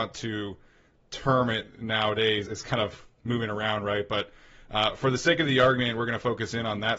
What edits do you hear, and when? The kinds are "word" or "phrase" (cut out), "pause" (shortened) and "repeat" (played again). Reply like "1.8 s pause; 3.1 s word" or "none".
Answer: 2.5 s word